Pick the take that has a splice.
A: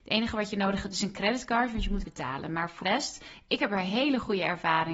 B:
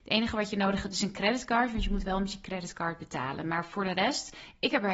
A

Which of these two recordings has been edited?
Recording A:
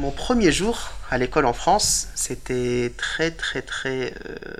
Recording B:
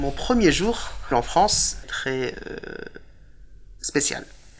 B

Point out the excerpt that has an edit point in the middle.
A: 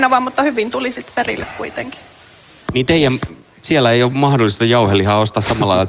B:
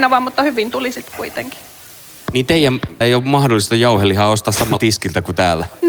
B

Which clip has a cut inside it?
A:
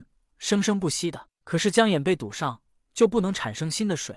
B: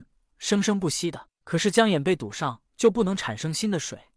B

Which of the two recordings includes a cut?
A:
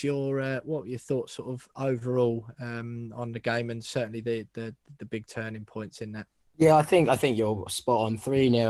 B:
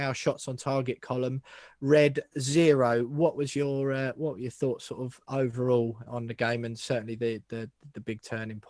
B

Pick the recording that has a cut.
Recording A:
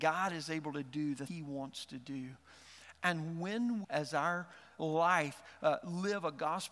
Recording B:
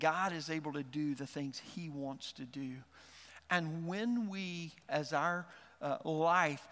A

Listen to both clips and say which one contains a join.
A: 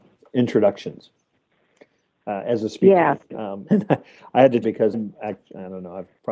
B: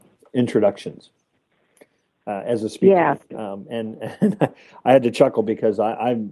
A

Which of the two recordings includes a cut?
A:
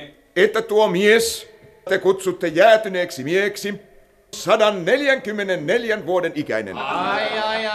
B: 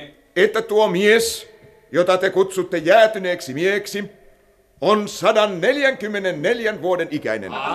A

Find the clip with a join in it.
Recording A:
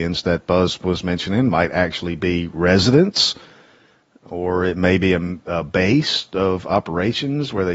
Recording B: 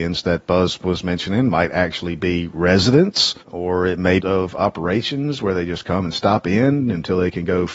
B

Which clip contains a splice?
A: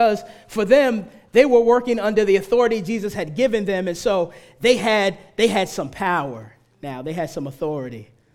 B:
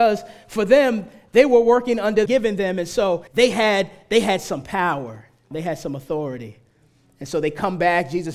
B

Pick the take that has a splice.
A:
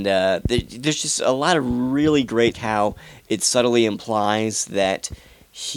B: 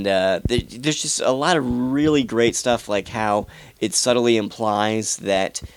A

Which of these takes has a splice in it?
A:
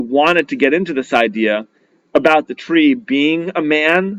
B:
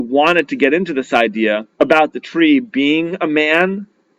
B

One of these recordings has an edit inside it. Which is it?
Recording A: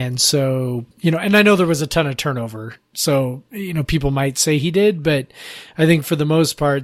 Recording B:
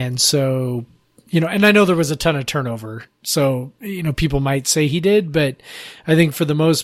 A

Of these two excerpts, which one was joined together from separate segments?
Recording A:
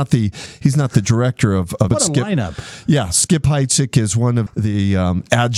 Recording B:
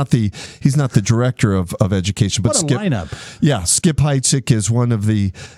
A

